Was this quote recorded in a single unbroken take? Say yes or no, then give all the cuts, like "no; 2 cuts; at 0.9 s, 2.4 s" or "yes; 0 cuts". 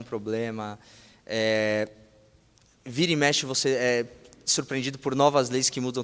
yes; 0 cuts